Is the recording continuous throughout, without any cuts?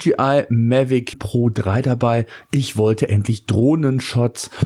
no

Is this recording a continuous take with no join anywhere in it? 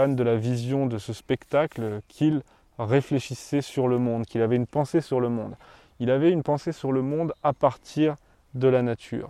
yes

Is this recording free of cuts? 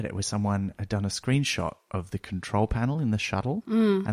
yes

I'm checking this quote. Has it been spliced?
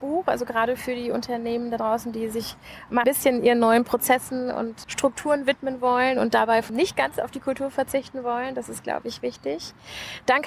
yes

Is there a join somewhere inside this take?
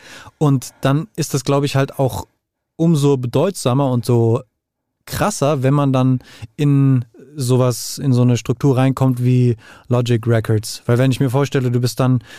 no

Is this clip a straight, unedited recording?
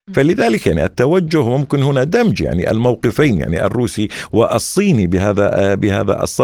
yes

